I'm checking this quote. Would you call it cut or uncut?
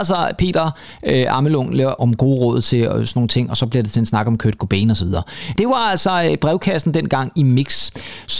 uncut